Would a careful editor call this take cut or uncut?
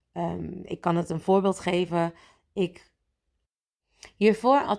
uncut